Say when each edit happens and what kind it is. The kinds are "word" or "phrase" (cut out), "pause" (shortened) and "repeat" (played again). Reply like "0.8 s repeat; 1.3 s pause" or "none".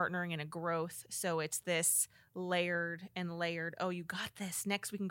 none